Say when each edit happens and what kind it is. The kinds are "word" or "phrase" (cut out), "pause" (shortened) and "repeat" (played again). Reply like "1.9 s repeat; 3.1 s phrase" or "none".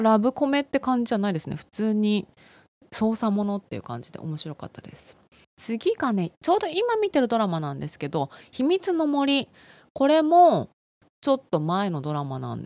none